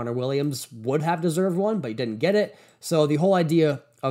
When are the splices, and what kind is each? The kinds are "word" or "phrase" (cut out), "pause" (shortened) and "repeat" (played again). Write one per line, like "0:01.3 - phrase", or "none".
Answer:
none